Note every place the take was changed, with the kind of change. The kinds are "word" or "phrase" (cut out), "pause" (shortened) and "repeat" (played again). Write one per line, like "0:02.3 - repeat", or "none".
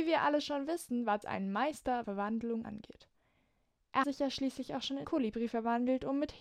0:01.2 - word
0:02.0 - word
0:02.6 - phrase
0:04.0 - word
0:05.0 - word